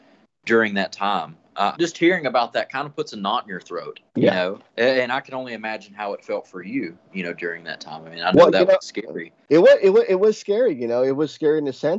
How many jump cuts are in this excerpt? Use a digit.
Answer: 4